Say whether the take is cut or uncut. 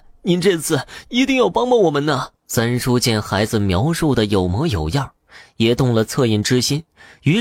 cut